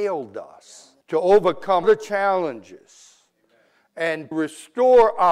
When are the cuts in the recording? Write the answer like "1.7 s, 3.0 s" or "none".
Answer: 1.0 s, 1.8 s, 4.3 s